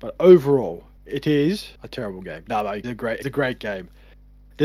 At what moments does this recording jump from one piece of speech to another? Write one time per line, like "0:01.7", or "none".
0:01.0
0:01.8
0:02.8
0:03.2